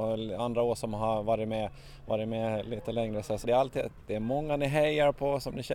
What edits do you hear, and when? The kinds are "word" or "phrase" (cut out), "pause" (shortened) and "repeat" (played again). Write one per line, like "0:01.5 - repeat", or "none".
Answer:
0:03.4 - word